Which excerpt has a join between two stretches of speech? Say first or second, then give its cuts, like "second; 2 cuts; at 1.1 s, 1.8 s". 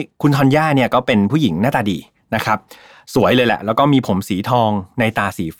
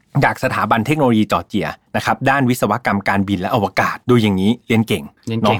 second; 1 cut; at 4.0 s